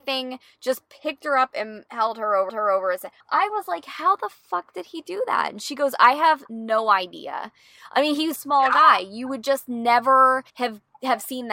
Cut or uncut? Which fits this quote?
cut